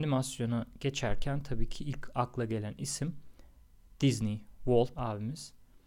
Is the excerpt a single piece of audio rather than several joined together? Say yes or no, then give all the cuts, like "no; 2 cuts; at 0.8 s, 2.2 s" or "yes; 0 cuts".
no; 1 cut; at 4.9 s